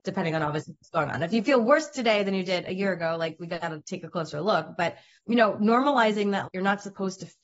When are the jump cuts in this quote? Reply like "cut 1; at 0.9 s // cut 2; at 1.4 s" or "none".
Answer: cut 1; at 5.2 s // cut 2; at 6.4 s